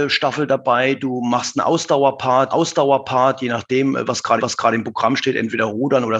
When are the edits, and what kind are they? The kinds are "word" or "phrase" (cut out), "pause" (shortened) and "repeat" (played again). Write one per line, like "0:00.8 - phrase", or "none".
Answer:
0:02.5 - repeat
0:04.4 - repeat